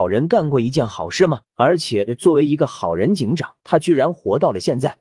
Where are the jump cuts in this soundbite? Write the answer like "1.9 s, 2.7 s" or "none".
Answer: 1.5 s, 3.6 s